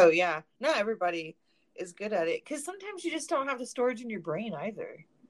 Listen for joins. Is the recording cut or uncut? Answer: uncut